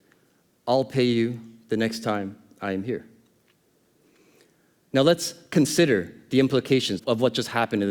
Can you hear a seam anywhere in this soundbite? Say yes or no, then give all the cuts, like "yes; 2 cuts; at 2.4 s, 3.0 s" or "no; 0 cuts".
yes; 1 cut; at 7.0 s